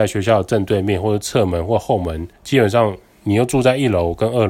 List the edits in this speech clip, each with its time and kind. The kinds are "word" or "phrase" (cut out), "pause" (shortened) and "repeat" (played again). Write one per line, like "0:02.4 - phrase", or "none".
0:02.4 - pause